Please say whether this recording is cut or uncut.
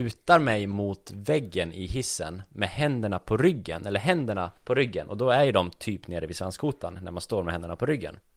cut